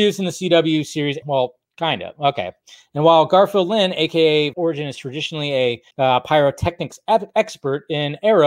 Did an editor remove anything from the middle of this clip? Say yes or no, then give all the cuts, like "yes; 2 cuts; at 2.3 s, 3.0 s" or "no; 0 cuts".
yes; 4 cuts; at 1.2 s, 1.6 s, 4.5 s, 5.9 s